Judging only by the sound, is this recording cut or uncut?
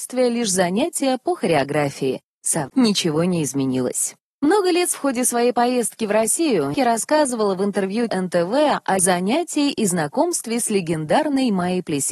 cut